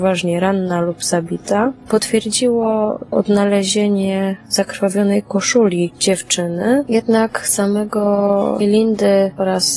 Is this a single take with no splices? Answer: no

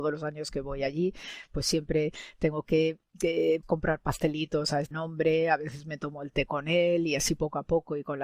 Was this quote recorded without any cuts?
no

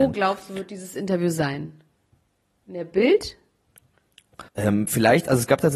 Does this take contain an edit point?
yes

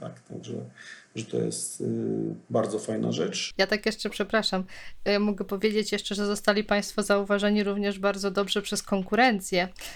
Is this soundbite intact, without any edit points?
no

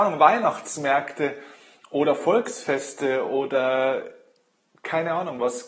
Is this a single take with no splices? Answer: yes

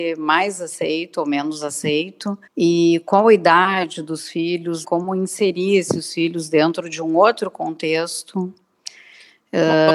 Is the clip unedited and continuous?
no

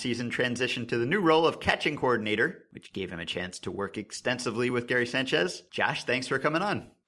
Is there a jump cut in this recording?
no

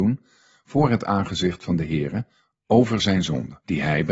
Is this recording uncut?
yes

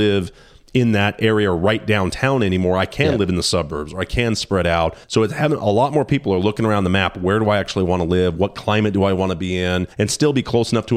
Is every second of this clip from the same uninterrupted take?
no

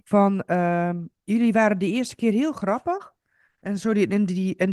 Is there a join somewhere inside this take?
yes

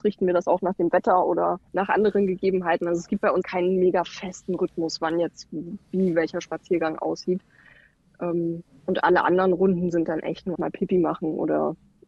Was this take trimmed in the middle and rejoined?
yes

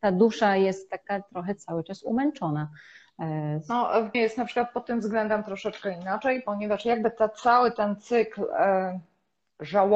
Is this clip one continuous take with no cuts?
no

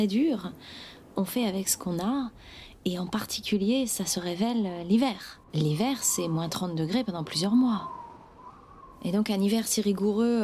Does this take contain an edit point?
yes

